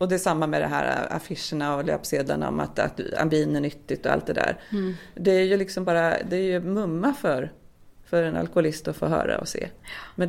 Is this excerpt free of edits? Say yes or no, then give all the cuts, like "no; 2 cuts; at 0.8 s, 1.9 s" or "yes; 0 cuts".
yes; 0 cuts